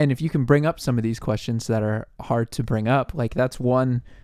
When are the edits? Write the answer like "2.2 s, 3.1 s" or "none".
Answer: none